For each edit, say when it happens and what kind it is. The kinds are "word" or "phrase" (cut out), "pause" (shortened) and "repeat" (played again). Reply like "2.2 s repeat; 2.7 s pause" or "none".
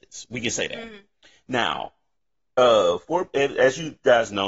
2.1 s pause